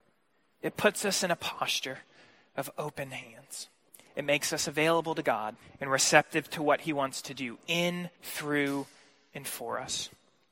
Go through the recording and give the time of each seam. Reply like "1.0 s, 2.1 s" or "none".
3.9 s, 5.6 s, 8.1 s